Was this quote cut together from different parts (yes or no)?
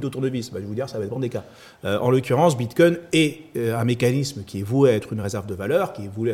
no